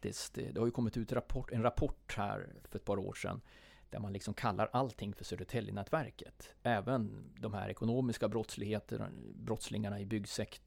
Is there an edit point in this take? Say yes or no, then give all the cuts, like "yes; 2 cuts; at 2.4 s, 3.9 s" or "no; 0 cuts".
no; 0 cuts